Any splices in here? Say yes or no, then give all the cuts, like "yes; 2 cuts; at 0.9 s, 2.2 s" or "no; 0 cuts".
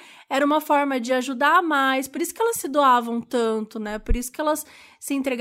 no; 0 cuts